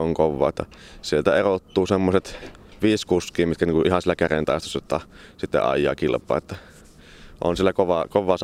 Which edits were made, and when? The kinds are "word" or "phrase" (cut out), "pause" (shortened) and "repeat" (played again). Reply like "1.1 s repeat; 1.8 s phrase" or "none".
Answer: none